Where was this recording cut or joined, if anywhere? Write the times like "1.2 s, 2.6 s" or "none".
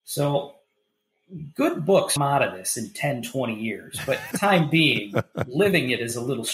2.2 s, 4.3 s

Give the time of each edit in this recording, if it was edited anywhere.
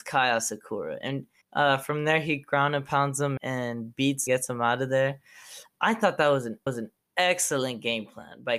1.4 s, 3.4 s, 4.3 s, 6.7 s

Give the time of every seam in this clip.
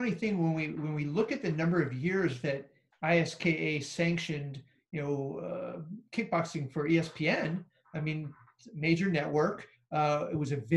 none

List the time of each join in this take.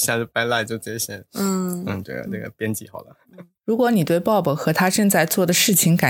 3.6 s

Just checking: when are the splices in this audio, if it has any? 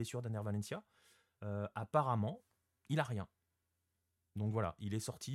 none

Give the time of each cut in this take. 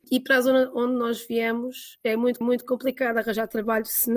2.4 s

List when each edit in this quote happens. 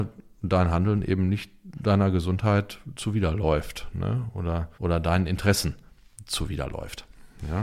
4.7 s

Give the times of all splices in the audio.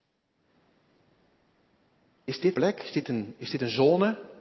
2.5 s

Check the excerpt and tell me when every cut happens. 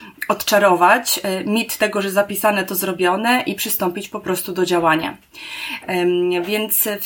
none

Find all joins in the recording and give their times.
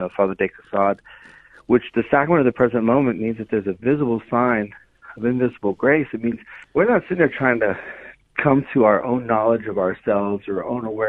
6.6 s

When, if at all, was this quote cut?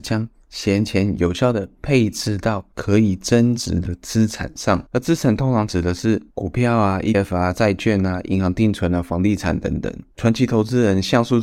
2.7 s, 4.9 s, 6.3 s, 7.1 s, 10.1 s

